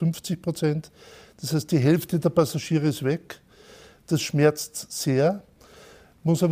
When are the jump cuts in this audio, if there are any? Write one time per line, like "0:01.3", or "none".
none